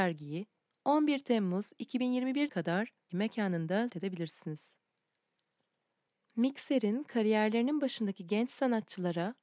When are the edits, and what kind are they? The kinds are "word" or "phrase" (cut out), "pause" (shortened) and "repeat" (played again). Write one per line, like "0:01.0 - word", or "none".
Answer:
0:02.5 - word
0:03.1 - word
0:03.9 - word